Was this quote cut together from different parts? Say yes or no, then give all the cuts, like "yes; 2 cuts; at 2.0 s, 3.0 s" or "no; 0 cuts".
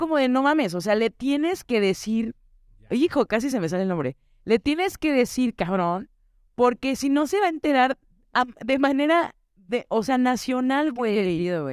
no; 0 cuts